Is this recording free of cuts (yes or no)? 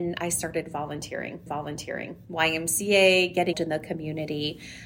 no